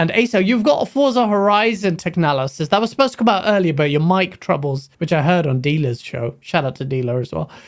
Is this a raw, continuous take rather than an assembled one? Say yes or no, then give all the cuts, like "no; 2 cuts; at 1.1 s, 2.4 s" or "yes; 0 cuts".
no; 1 cut; at 4.9 s